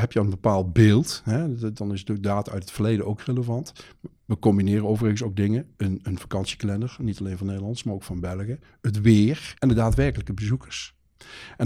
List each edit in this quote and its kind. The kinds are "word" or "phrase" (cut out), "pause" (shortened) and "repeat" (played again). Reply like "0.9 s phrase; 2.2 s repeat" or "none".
9.6 s pause